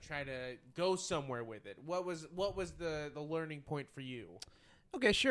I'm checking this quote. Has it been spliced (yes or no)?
no